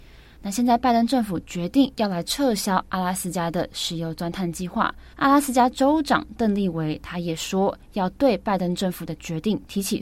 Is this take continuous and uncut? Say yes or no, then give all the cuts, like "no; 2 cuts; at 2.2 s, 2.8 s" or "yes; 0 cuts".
no; 1 cut; at 5.1 s